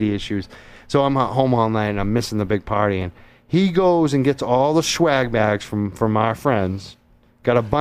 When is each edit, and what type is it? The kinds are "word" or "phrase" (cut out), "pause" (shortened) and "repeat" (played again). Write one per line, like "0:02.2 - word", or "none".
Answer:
none

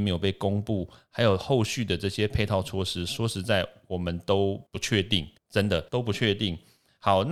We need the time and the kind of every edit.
0:04.7 - pause
0:05.4 - pause
0:05.9 - pause

